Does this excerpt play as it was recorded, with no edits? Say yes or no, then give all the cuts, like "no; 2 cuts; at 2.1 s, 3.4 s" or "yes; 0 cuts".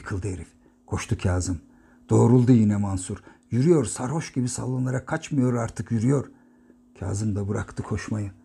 yes; 0 cuts